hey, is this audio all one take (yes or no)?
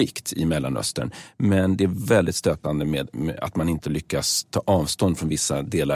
yes